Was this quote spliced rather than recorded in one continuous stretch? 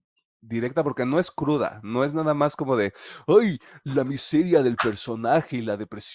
no; 0 cuts

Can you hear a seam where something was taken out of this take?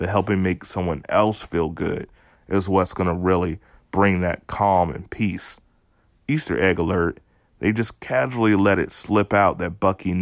no; 0 cuts

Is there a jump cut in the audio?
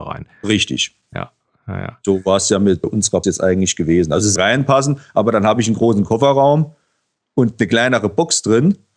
yes; 3 cuts; at 2.8 s, 3.2 s, 4.4 s

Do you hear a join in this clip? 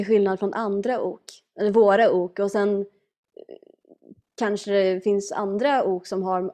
no; 0 cuts

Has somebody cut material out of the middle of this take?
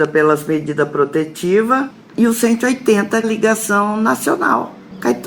yes; 1 cut; at 3.2 s

